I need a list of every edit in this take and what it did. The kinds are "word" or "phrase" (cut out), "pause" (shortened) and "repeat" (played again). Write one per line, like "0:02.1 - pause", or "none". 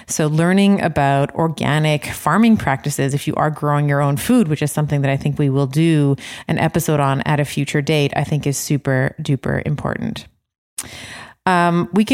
none

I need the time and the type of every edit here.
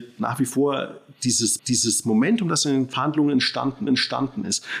0:01.6 - repeat
0:03.9 - repeat

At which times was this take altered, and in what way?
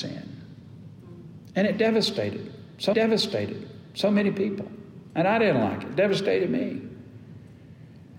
0:02.9 - repeat

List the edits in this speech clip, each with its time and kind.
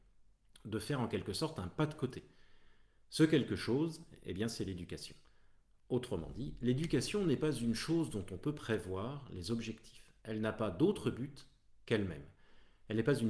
none

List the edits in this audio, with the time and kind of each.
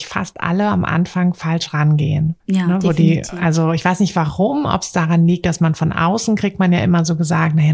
0:02.4 - pause

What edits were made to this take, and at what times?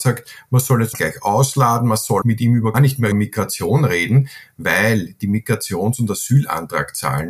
0:00.9 - word
0:02.2 - word
0:02.7 - word
0:03.1 - word

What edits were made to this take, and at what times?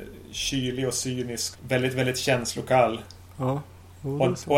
0:01.5 - word

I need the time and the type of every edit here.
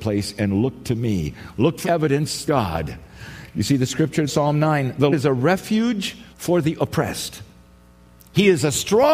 0:01.8 - word
0:02.5 - phrase
0:04.3 - word
0:05.1 - word
0:06.3 - pause

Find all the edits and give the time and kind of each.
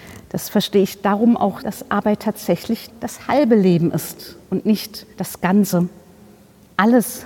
0:01.6 - word
0:02.9 - word
0:04.4 - pause
0:05.1 - pause

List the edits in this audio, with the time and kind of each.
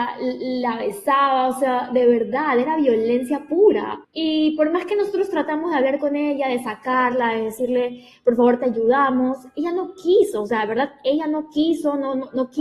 0:04.0 - pause

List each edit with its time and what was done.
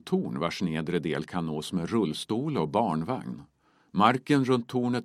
none

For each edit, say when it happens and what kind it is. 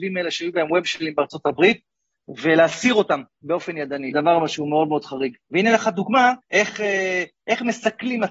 0:04.1 - word
0:05.4 - pause
0:06.4 - pause

